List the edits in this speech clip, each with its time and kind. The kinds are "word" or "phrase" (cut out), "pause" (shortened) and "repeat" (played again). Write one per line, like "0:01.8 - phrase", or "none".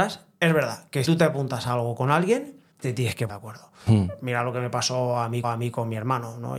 0:01.0 - word
0:02.7 - pause
0:03.3 - word
0:05.4 - repeat